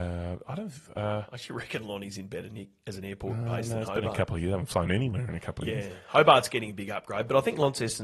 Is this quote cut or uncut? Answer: uncut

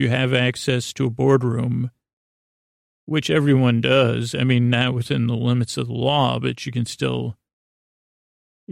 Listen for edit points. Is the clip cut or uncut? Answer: uncut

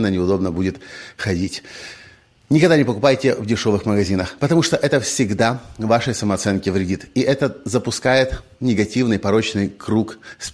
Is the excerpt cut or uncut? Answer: uncut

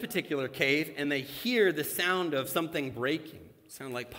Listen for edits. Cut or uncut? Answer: uncut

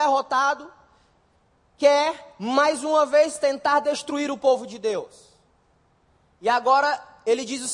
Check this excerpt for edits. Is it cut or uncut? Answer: uncut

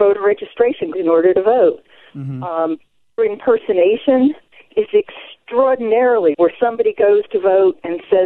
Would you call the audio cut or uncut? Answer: cut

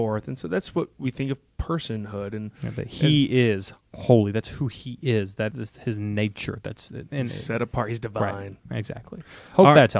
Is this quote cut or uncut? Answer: cut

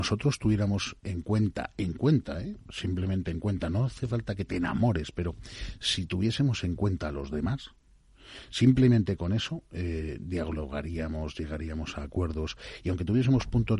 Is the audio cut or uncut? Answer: uncut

